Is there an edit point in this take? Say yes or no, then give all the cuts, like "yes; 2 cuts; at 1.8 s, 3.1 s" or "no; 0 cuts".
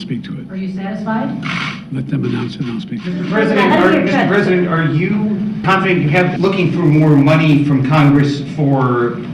yes; 2 cuts; at 5.6 s, 6.4 s